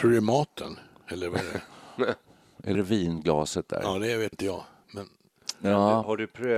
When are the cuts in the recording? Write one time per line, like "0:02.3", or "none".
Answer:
0:02.7
0:04.3